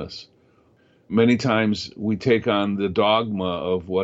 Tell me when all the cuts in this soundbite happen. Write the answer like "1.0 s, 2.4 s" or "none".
none